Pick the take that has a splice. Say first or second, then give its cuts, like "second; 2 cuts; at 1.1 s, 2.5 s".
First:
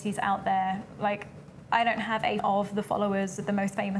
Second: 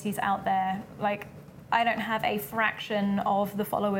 first; 1 cut; at 2.4 s